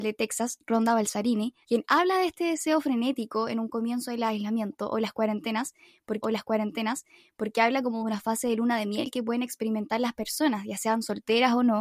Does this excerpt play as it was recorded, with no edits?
no; 2 cuts; at 1.6 s, 6.2 s

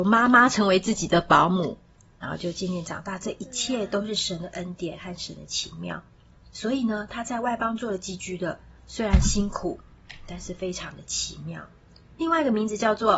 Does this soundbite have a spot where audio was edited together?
yes; 1 cut; at 8.8 s

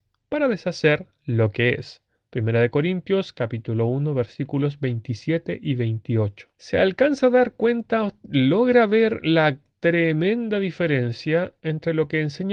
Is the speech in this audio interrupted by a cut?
no; 0 cuts

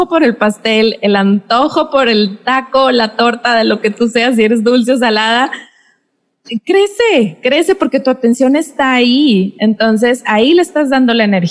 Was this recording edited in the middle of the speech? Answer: no; 0 cuts

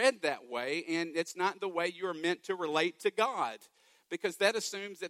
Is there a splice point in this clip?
no; 0 cuts

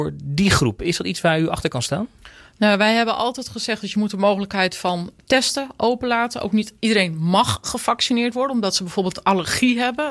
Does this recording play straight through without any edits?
yes; 0 cuts

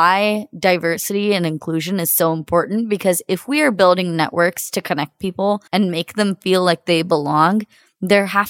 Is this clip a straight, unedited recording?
no; 1 cut; at 5.7 s

